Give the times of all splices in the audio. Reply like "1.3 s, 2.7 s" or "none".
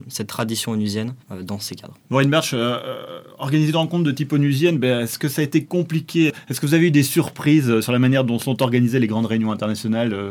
1.2 s, 2.0 s

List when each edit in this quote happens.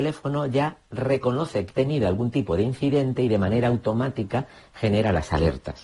1.7 s

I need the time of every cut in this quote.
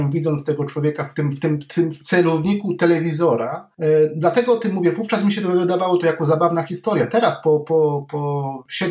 2.0 s

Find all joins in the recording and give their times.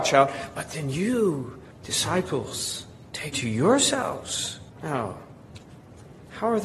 1.7 s, 3.3 s, 4.7 s

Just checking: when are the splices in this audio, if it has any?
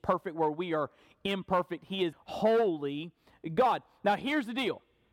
2.1 s

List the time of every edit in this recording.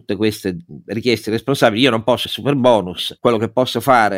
2.2 s

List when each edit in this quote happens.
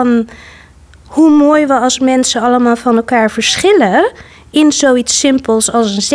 none

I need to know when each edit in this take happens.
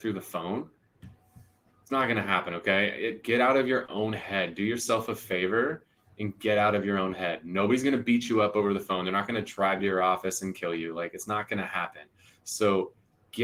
none

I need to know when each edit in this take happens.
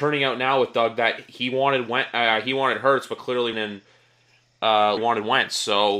3.5 s, 5.0 s

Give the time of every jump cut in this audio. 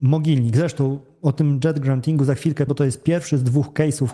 2.7 s

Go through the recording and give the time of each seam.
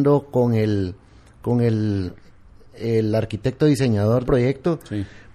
4.2 s

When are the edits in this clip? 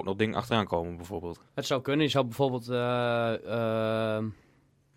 1.5 s

